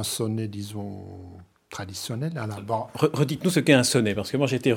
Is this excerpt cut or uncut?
uncut